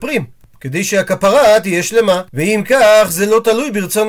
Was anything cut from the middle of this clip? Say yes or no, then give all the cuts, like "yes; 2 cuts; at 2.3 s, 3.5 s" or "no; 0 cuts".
yes; 1 cut; at 2.3 s